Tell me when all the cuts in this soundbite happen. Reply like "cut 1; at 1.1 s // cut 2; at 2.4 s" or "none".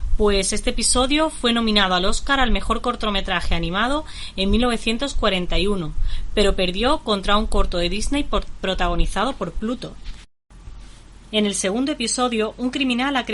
none